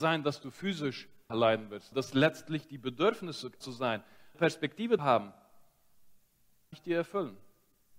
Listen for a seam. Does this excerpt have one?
yes; 6 cuts; at 1.3 s, 1.9 s, 3.6 s, 4.3 s, 5.0 s, 6.7 s

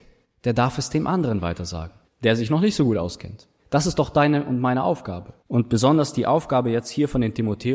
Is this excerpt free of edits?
no; 3 cuts; at 2.0 s, 3.6 s, 5.4 s

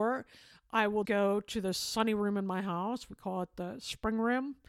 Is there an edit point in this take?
yes; 1 cut; at 1.0 s

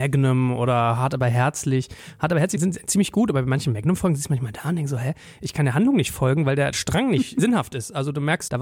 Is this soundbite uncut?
yes; 0 cuts

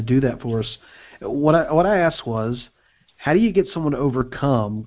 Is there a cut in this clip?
no; 0 cuts

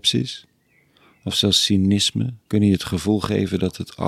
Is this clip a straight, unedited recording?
no; 1 cut; at 2.4 s

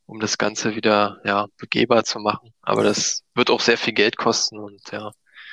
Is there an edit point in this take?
no; 0 cuts

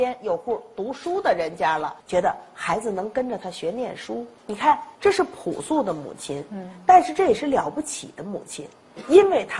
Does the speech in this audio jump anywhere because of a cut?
yes; 3 cuts; at 2.0 s, 4.4 s, 4.9 s

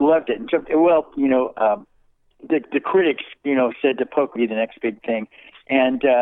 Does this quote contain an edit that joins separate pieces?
yes; 1 cut; at 4.4 s

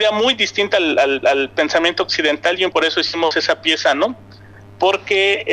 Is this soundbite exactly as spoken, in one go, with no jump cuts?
no; 2 cuts; at 1.2 s, 2.7 s

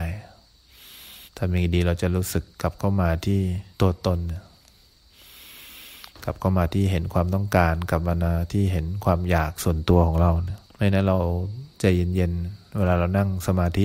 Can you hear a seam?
yes; 5 cuts; at 1.3 s, 2.5 s, 3.7 s, 10.6 s, 11.7 s

